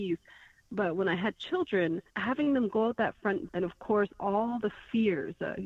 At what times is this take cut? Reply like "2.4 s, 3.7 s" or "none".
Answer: 2.1 s, 3.5 s